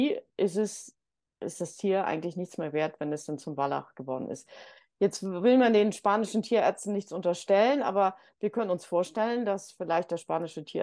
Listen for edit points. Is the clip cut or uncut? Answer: uncut